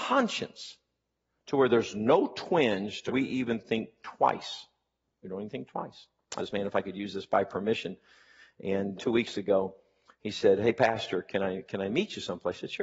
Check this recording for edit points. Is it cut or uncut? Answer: cut